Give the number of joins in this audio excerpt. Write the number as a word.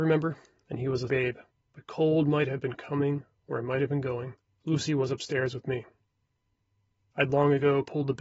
three